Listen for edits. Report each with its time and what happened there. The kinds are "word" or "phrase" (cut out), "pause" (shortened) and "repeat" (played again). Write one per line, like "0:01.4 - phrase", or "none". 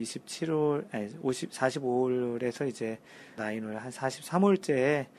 0:03.4 - word